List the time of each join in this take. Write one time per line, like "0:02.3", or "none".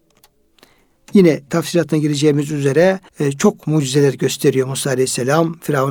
0:03.1